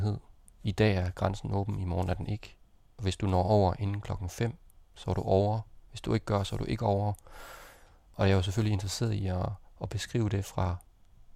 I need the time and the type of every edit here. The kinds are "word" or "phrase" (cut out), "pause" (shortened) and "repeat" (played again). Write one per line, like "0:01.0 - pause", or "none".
0:05.8 - pause